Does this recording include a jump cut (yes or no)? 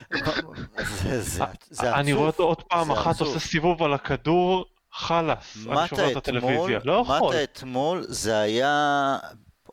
no